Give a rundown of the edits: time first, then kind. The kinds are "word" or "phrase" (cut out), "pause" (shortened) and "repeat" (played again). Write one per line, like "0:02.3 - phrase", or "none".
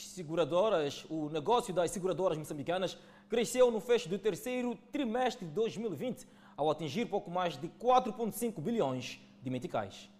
none